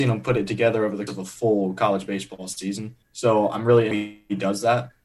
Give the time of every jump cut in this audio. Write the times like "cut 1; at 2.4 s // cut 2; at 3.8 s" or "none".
cut 1; at 1.1 s // cut 2; at 3.0 s // cut 3; at 3.9 s